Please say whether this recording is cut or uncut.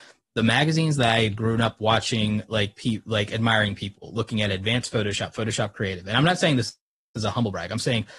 uncut